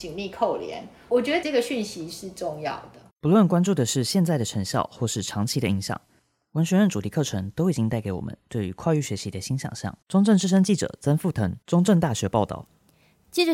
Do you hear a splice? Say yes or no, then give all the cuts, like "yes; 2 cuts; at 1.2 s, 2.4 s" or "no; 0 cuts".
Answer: yes; 3 cuts; at 3.1 s, 10.0 s, 11.6 s